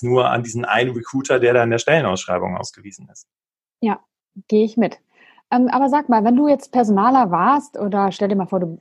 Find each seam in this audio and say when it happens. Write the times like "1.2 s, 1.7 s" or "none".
none